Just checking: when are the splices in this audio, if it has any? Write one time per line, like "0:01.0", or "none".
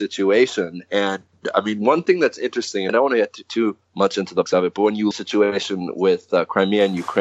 0:02.9
0:03.8
0:04.5
0:05.1